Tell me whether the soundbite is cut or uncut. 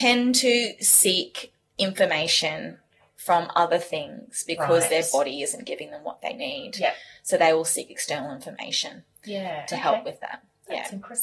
uncut